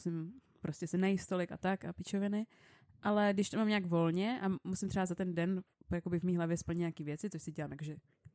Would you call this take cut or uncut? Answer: uncut